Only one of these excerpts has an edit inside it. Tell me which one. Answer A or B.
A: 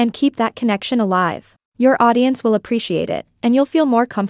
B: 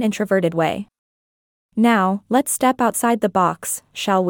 A